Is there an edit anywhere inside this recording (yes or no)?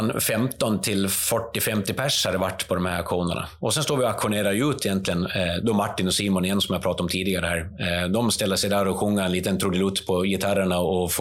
no